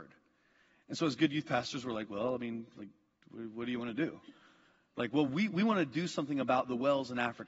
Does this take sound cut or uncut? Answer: uncut